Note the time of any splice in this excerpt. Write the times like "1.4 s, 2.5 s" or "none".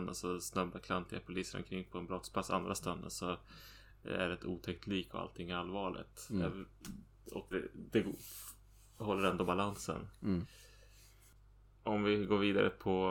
7.5 s